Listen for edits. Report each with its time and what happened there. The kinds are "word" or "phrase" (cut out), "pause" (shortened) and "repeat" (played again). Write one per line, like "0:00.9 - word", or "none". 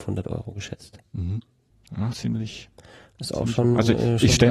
0:02.1 - word